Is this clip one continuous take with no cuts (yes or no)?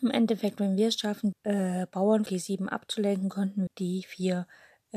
no